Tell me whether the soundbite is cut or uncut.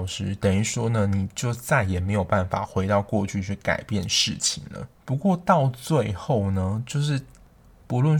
cut